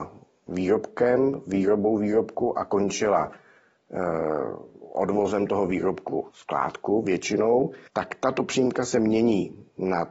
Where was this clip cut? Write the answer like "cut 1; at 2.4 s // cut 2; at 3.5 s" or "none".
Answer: cut 1; at 6.3 s // cut 2; at 7.9 s